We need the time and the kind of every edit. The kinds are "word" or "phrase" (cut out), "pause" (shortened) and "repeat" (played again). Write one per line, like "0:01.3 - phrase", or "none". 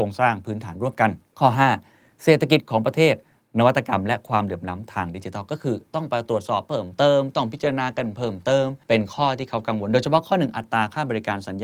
0:01.3 - pause
0:08.8 - pause